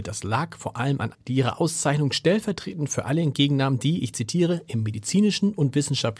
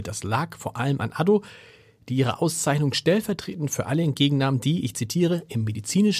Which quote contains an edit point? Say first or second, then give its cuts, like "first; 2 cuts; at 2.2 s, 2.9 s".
first; 1 cut; at 1.1 s